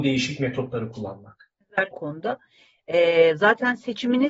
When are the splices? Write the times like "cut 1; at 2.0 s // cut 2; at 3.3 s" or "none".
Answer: cut 1; at 1.9 s